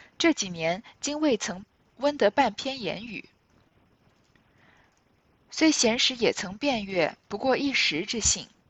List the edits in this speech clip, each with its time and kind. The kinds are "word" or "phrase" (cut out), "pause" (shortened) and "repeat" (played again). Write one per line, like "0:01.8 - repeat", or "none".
0:07.2 - pause